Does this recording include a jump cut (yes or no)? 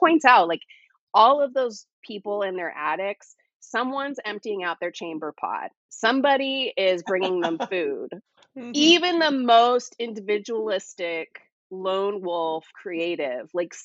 yes